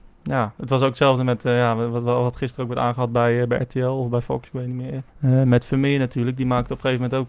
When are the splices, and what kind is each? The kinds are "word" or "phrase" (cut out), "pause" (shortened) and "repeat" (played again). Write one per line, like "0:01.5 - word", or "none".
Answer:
0:05.1 - pause